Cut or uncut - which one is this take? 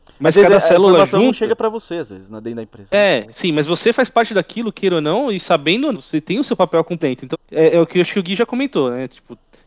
cut